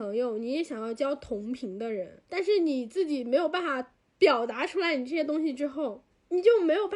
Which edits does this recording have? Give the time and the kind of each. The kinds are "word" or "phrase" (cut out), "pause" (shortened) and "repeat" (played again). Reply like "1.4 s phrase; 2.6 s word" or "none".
2.2 s pause